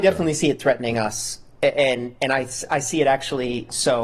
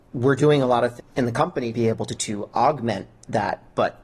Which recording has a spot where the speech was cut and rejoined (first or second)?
second